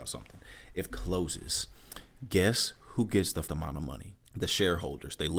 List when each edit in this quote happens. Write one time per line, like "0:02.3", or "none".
0:00.9
0:03.5
0:04.2